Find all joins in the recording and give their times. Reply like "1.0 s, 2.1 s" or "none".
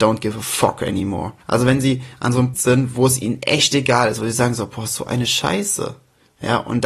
1.4 s, 2.5 s